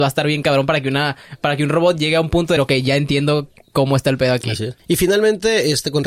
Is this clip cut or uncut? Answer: cut